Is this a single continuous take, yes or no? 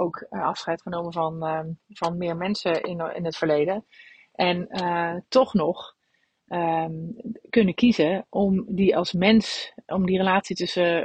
yes